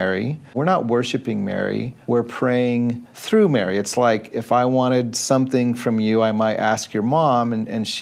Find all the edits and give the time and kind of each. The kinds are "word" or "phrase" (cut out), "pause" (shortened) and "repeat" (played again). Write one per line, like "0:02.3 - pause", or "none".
none